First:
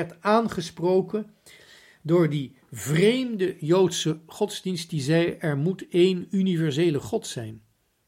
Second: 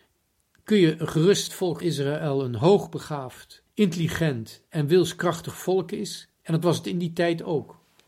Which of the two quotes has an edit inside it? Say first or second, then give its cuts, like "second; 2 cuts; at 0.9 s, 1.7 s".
second; 4 cuts; at 1.5 s, 1.8 s, 3.7 s, 6.3 s